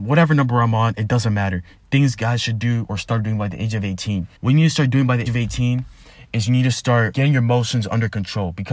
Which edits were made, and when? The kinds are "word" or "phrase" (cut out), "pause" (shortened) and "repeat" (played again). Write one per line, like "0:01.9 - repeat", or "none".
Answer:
0:04.4 - pause
0:05.3 - word
0:07.1 - word